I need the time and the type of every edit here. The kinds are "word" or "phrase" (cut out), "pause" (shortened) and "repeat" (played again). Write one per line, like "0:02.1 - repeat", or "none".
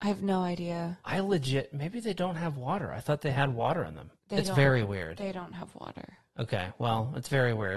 0:04.2 - pause